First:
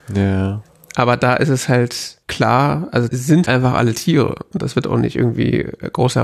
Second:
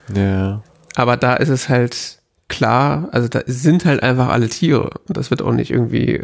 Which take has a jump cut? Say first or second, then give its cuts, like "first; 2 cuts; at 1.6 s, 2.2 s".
first; 3 cuts; at 2.2 s, 3.1 s, 3.5 s